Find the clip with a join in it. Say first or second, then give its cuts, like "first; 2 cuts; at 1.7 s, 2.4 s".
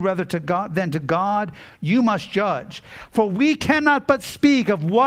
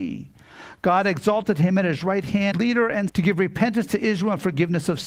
second; 2 cuts; at 2.5 s, 3.1 s